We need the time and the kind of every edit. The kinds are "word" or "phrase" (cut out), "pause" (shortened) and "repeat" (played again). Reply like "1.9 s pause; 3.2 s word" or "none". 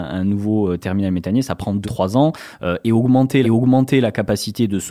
1.8 s word; 3.4 s repeat